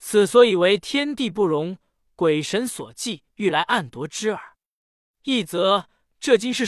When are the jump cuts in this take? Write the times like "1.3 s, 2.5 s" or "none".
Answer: 3.3 s